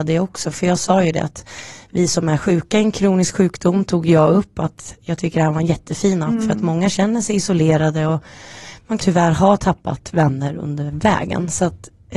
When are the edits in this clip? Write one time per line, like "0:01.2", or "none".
0:09.0